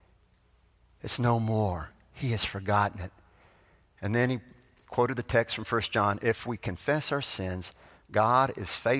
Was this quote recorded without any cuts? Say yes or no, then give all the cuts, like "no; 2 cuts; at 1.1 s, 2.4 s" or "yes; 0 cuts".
yes; 0 cuts